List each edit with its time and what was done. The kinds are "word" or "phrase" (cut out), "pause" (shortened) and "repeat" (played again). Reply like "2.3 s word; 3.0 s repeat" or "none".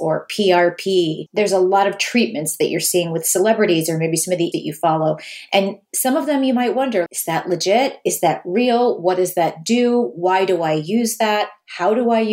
4.5 s word; 7.1 s word